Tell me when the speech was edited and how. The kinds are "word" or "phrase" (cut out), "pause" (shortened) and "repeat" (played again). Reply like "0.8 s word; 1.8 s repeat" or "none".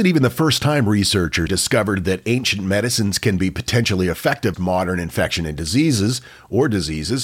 1.5 s word; 4.5 s word